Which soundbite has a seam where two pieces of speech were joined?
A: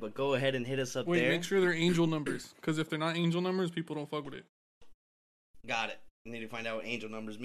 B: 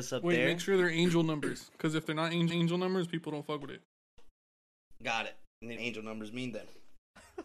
B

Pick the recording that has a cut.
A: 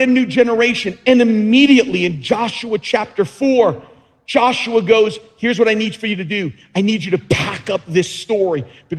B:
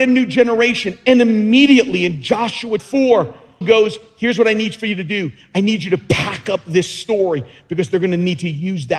B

